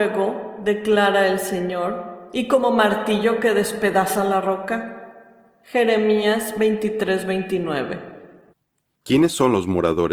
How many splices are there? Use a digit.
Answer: 0